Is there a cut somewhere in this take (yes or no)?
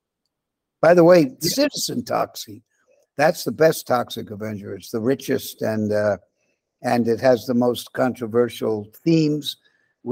no